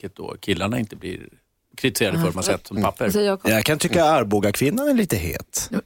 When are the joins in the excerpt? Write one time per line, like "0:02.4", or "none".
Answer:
0:01.7
0:02.3
0:02.8